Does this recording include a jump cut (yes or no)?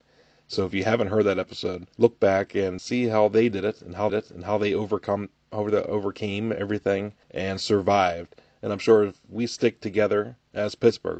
yes